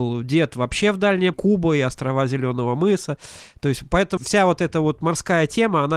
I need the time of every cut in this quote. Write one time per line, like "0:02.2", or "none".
0:01.3
0:04.2